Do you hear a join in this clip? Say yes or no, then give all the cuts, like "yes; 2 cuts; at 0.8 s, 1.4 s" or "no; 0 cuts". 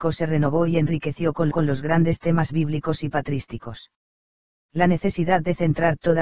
yes; 2 cuts; at 1.5 s, 2.5 s